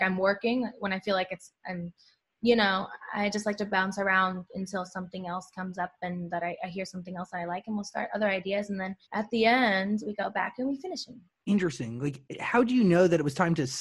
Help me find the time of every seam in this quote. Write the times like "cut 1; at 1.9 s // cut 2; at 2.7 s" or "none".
cut 1; at 2.2 s // cut 2; at 9.0 s // cut 3; at 11.3 s